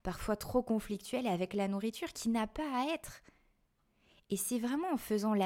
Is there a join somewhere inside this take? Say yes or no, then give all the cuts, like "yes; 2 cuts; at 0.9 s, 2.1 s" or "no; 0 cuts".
no; 0 cuts